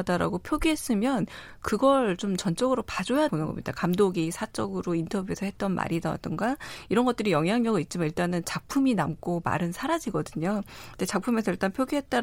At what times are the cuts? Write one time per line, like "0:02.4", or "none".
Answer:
0:03.3